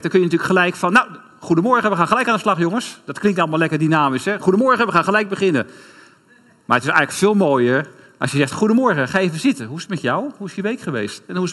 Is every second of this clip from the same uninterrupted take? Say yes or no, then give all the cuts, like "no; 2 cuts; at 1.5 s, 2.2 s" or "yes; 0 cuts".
yes; 0 cuts